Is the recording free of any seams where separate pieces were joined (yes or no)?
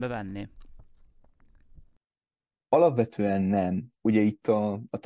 no